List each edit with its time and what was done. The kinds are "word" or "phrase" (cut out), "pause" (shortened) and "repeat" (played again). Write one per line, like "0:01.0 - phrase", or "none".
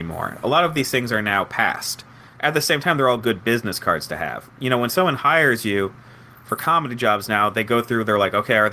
none